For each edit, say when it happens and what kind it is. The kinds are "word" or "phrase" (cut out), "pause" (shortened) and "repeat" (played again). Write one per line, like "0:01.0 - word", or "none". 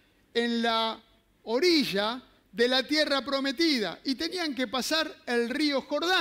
none